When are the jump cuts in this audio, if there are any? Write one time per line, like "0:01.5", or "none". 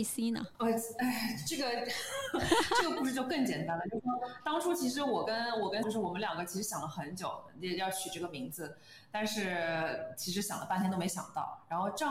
0:05.8